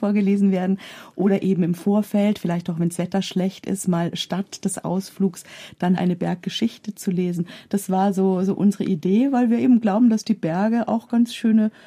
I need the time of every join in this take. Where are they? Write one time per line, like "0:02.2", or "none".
0:06.0